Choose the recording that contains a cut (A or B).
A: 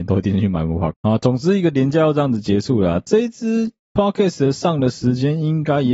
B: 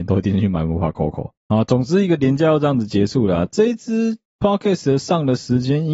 A